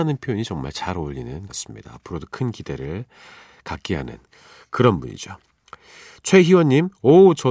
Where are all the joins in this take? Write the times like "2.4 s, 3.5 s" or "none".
1.5 s

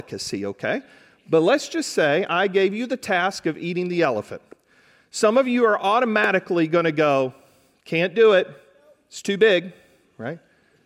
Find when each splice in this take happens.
none

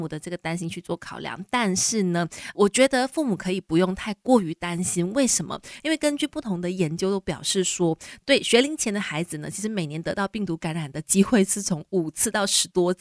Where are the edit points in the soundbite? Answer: 2.5 s

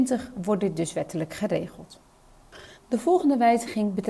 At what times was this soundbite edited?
2.8 s

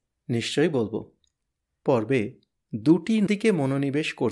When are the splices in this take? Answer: 1.9 s, 3.3 s

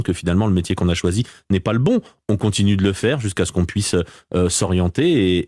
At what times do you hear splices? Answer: none

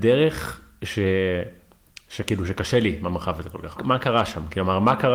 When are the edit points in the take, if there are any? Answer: 3.8 s

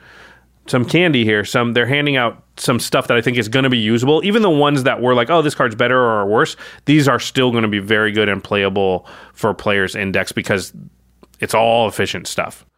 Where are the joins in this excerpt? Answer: none

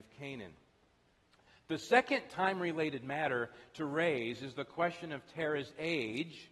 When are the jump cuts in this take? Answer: none

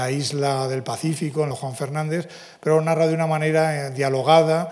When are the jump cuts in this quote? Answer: 1.5 s

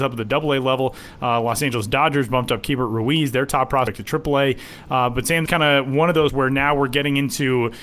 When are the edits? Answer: 5.5 s, 6.3 s

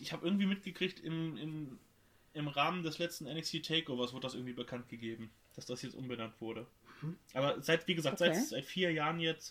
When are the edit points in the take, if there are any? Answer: none

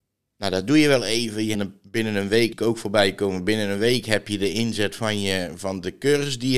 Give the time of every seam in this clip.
1.5 s, 2.5 s

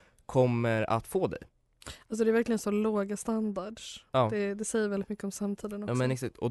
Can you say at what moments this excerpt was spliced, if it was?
4.1 s

